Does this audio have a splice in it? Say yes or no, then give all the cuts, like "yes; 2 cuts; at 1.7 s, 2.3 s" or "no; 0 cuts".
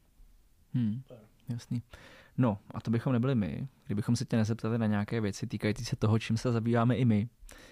no; 0 cuts